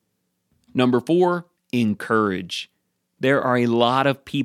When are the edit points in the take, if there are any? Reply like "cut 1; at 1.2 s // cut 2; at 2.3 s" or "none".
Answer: cut 1; at 1.6 s